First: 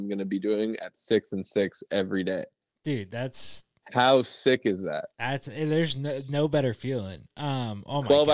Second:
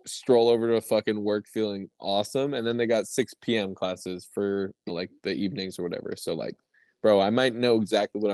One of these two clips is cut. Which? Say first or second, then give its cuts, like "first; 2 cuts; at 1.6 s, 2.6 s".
second; 1 cut; at 4.9 s